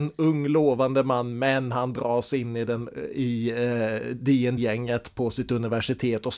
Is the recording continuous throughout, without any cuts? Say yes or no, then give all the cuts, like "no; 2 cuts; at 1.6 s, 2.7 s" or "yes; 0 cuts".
no; 1 cut; at 4.6 s